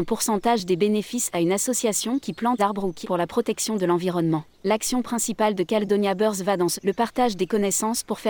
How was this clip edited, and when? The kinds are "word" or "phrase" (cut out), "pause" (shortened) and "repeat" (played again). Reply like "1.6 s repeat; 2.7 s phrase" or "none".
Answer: 2.6 s word; 3.0 s word; 4.5 s pause; 6.8 s word